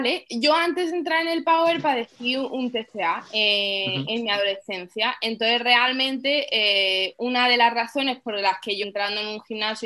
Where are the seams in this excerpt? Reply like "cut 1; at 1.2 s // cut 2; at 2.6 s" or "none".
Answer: cut 1; at 8.8 s